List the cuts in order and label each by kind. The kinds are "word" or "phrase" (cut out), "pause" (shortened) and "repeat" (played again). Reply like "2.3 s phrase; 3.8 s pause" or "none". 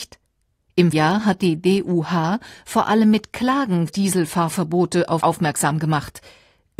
0.9 s word; 3.9 s word; 5.2 s word

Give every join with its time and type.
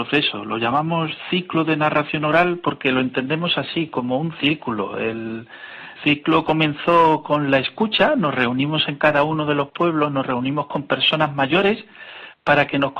6.0 s word

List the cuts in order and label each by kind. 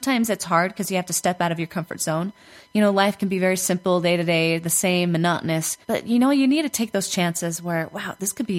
5.8 s pause

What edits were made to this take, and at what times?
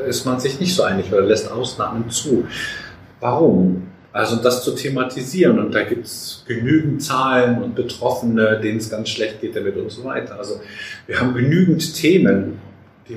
none

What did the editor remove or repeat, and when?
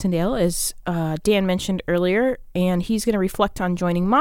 none

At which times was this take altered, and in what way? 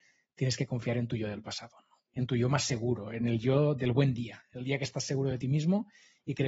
none

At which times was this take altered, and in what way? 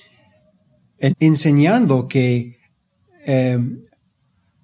1.1 s word

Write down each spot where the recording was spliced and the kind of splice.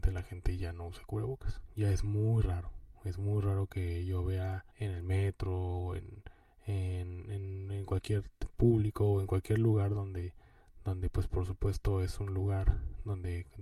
4.7 s pause; 8.5 s phrase

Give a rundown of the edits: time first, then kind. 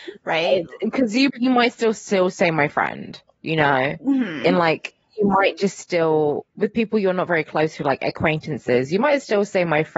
1.3 s word

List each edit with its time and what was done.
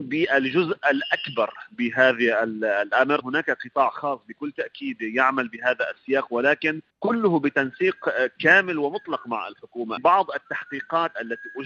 3.2 s word; 6.9 s pause; 10.0 s phrase

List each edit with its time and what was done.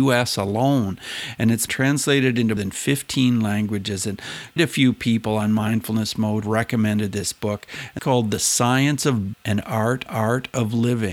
1.7 s word; 2.6 s word; 4.6 s word; 6.4 s word; 8.0 s phrase; 9.3 s word; 10.1 s repeat

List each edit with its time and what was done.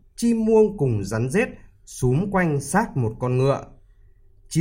none

